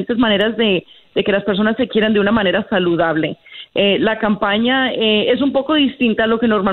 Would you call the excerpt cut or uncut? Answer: uncut